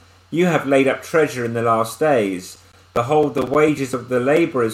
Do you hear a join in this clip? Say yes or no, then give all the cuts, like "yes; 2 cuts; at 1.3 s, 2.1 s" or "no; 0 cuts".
no; 0 cuts